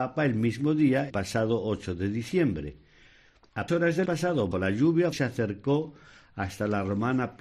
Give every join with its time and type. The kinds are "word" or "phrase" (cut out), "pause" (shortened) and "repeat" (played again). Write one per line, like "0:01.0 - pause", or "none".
0:01.1 - word
0:03.7 - word
0:04.1 - word
0:04.5 - word
0:05.1 - word